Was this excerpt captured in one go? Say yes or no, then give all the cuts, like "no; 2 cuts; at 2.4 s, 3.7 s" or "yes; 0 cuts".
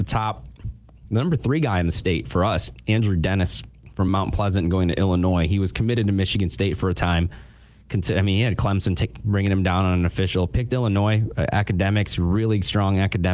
yes; 0 cuts